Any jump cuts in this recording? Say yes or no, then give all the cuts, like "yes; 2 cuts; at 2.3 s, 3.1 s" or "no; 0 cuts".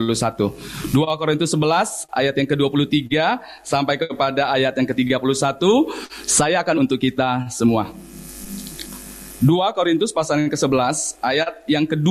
yes; 1 cut; at 6.8 s